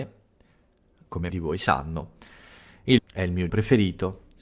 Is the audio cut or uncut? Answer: cut